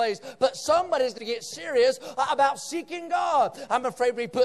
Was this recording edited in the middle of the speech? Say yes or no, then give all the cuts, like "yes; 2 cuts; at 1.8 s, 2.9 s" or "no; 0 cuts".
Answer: yes; 1 cut; at 1.2 s